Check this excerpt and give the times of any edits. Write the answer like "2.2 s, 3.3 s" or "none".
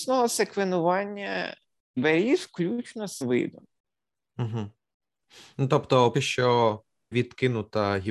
2.0 s, 3.2 s, 6.1 s, 7.1 s